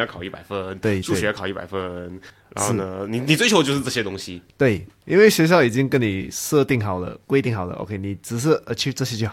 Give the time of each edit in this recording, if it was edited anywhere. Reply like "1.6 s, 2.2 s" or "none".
2.3 s